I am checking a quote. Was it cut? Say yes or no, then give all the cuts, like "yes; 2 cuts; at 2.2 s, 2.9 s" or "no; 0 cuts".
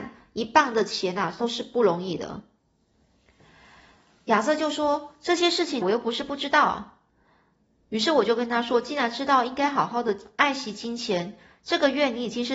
yes; 2 cuts; at 5.8 s, 7.1 s